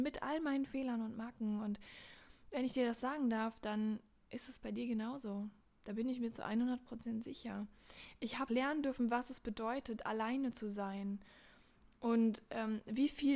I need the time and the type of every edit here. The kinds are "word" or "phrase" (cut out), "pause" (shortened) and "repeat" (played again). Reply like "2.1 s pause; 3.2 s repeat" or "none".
8.5 s word